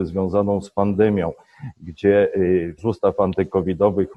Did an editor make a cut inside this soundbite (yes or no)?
yes